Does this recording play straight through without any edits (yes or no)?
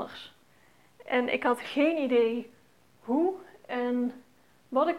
yes